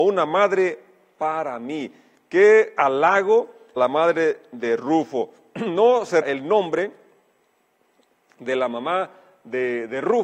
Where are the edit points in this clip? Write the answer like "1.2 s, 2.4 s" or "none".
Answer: 3.8 s, 6.2 s